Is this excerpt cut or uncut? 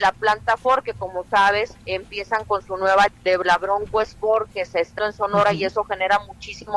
cut